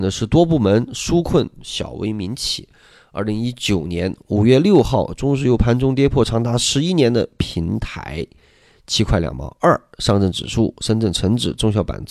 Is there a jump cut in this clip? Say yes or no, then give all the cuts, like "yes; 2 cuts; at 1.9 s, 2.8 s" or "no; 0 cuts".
no; 0 cuts